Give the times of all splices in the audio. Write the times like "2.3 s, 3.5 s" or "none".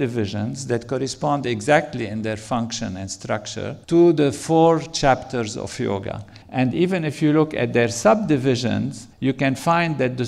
3.8 s, 6.4 s, 9.1 s